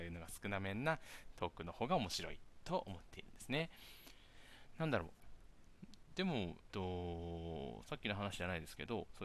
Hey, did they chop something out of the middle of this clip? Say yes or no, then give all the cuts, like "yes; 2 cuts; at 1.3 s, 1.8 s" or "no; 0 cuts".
yes; 1 cut; at 6.7 s